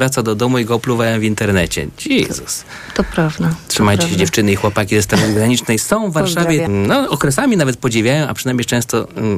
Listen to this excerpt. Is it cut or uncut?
cut